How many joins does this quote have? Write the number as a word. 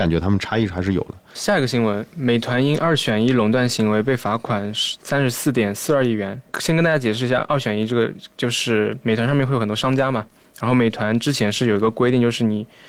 zero